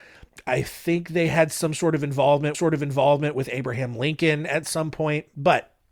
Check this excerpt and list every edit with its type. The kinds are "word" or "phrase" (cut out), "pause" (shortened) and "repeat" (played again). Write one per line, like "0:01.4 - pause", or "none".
0:02.5 - repeat